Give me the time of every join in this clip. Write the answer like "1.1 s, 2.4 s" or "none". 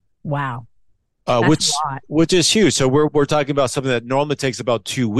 3.1 s